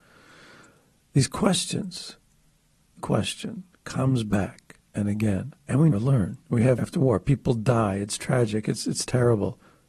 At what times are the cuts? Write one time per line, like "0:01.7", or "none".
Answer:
0:03.0
0:04.8
0:05.6
0:05.9
0:06.4
0:06.8